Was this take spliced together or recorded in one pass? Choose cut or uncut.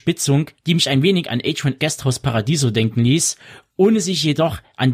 cut